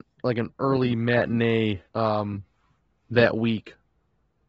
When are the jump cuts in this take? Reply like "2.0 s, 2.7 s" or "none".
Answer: 1.9 s